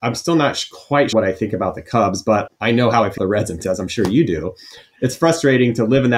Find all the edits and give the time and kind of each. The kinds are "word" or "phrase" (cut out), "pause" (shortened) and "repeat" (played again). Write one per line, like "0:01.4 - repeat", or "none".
0:01.1 - word
0:02.5 - word
0:03.2 - word
0:03.6 - word